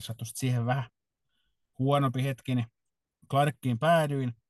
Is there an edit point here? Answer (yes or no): no